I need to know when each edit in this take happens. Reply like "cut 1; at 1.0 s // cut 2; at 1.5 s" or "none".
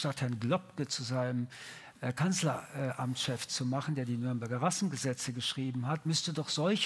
none